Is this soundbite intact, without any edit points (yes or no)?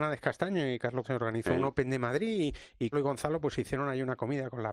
no